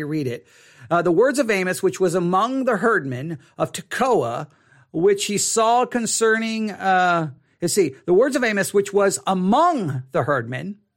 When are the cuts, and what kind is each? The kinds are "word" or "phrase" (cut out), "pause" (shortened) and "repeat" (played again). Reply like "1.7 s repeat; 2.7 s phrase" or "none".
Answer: none